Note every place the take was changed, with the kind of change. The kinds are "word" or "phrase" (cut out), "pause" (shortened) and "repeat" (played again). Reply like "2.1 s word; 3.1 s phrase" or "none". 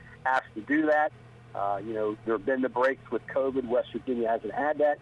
2.2 s word